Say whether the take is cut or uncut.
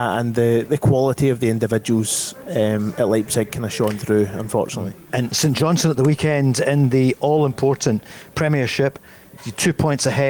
uncut